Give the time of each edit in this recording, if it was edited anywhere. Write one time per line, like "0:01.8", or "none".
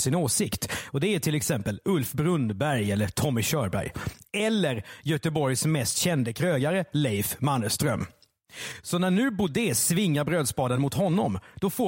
none